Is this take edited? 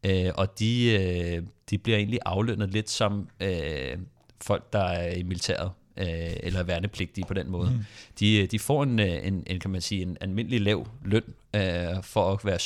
no; 0 cuts

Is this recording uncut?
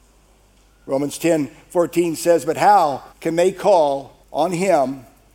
no; 2 cuts; at 3.1 s, 4.2 s

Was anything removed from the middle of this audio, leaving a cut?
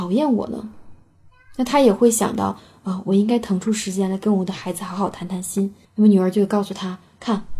yes; 1 cut; at 5.8 s

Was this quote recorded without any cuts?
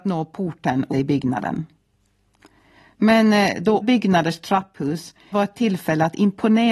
no; 3 cuts; at 0.9 s, 3.8 s, 5.3 s

